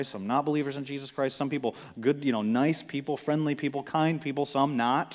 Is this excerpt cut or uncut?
uncut